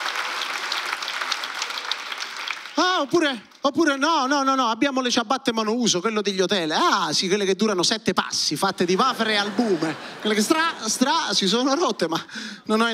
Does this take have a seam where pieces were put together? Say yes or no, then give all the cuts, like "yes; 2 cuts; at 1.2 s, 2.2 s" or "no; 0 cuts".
no; 0 cuts